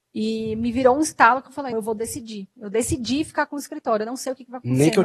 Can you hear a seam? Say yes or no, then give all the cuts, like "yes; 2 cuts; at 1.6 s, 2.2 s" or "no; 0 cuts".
yes; 1 cut; at 1.7 s